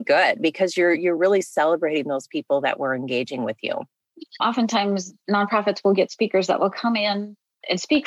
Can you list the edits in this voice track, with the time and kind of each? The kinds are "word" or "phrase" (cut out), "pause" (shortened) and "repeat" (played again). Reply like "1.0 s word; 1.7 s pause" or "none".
none